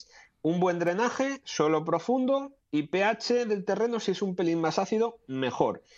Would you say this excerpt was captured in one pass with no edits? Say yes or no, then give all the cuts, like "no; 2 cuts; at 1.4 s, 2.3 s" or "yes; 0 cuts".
yes; 0 cuts